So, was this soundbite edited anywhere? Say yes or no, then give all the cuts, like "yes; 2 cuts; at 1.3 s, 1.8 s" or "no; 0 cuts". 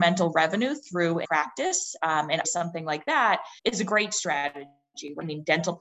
yes; 3 cuts; at 1.2 s, 2.4 s, 3.6 s